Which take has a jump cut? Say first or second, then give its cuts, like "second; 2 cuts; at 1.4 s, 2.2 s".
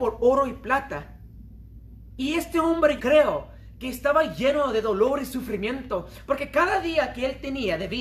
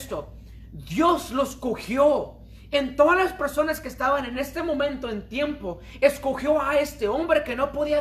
first; 1 cut; at 3.0 s